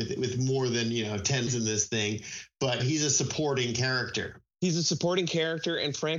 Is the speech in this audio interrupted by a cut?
yes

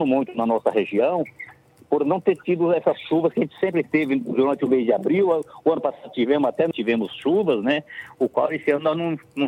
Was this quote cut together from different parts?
yes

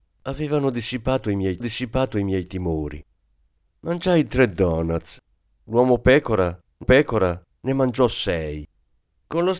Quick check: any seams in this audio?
yes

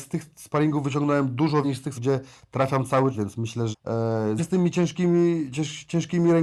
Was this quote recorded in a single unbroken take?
no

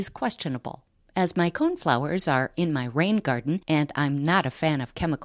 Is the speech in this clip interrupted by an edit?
no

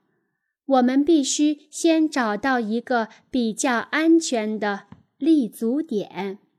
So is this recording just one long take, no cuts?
yes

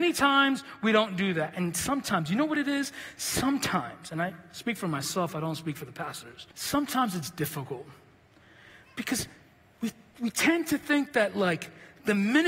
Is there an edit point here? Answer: yes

